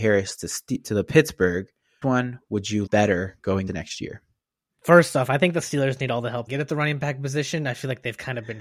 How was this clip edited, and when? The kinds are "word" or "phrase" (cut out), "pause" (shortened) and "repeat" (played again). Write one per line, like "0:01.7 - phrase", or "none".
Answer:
0:02.0 - word
0:02.9 - word
0:03.7 - word
0:06.5 - phrase